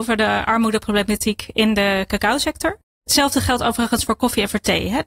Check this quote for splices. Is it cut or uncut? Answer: uncut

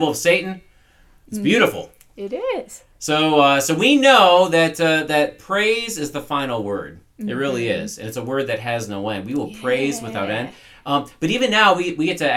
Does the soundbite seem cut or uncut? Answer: uncut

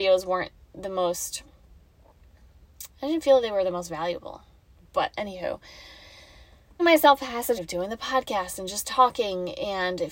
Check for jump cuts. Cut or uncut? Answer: cut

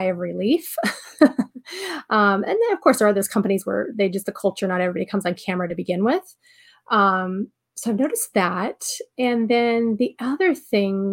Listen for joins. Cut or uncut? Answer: uncut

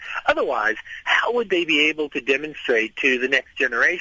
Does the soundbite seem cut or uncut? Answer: uncut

